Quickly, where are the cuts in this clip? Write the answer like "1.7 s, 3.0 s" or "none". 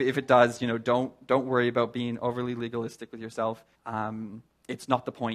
3.7 s